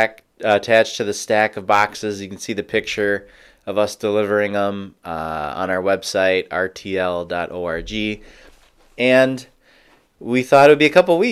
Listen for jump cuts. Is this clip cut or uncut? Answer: uncut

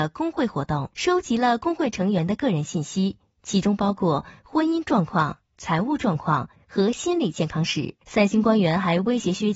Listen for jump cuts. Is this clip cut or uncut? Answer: cut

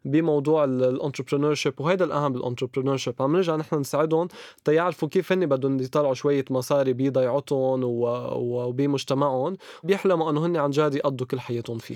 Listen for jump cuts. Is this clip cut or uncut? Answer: cut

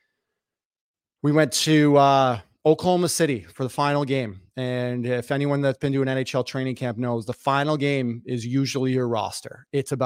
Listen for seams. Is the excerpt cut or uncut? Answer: uncut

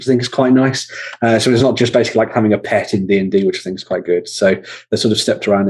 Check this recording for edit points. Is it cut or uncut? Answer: uncut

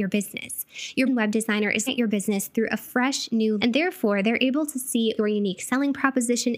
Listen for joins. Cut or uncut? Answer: cut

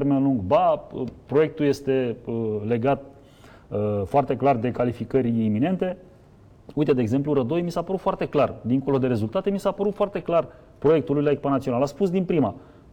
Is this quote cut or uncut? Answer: uncut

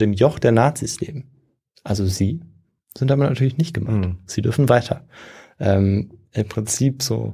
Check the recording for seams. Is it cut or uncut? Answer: uncut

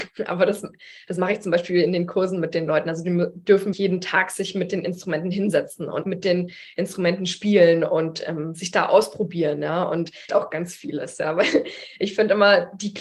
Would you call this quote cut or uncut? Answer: cut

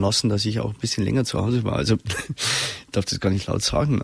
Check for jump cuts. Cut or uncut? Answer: uncut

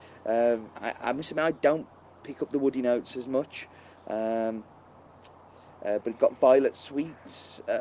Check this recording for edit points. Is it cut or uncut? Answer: uncut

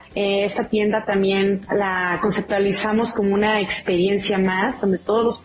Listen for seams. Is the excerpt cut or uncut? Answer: uncut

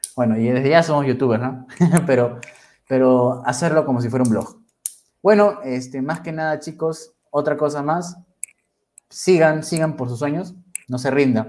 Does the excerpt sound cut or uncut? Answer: uncut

